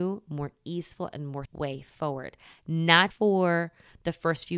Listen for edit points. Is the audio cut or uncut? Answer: cut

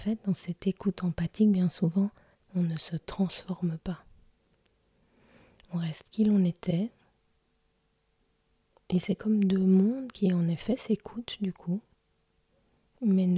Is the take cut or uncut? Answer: cut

